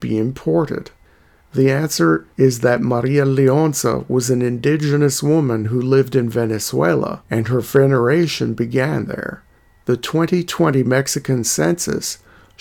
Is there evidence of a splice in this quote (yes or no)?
no